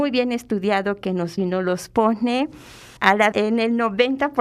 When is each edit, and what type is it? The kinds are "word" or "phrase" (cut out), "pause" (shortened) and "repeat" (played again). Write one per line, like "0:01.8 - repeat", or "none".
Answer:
0:01.4 - phrase
0:03.0 - pause
0:03.3 - word